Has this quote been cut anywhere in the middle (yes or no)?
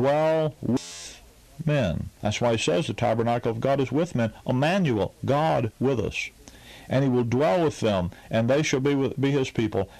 yes